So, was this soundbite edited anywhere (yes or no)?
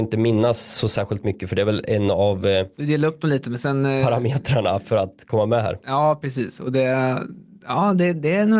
no